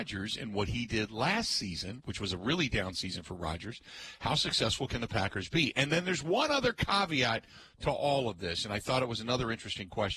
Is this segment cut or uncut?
uncut